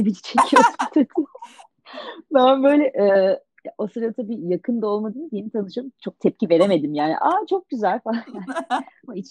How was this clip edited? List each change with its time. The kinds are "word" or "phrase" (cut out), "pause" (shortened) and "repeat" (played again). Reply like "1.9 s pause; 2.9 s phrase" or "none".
none